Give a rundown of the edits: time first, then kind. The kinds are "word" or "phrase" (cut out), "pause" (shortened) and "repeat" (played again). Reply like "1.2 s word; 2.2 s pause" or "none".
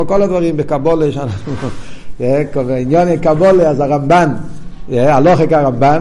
none